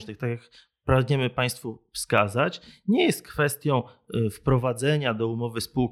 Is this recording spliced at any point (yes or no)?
no